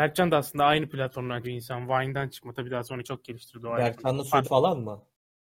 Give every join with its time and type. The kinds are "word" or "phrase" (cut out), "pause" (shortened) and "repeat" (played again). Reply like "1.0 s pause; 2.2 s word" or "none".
1.4 s word; 3.0 s word; 4.4 s word